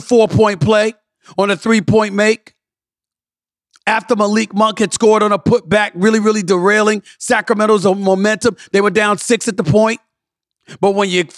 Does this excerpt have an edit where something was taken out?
no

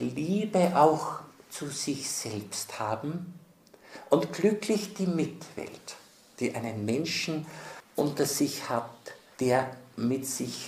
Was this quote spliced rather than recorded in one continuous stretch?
no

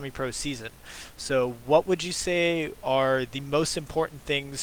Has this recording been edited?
no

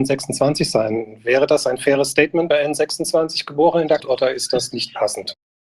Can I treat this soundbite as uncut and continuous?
no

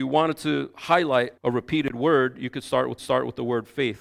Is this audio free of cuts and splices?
no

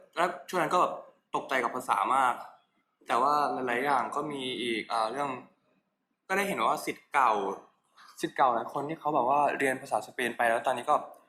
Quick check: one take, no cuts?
yes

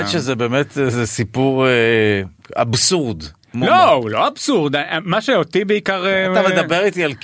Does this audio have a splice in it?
no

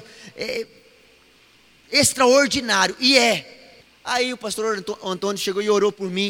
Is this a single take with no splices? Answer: no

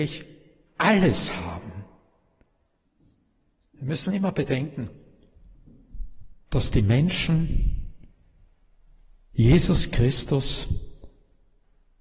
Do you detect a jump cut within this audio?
no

